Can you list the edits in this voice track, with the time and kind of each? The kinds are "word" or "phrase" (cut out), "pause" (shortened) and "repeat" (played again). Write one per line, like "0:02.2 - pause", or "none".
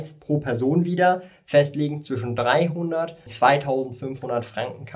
0:03.3 - word